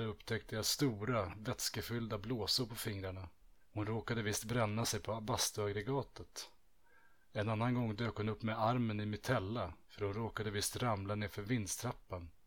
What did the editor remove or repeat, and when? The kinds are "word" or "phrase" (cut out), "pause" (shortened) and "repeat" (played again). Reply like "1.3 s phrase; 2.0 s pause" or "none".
3.6 s pause; 9.8 s pause